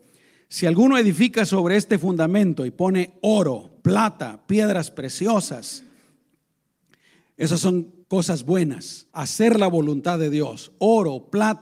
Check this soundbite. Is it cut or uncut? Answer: cut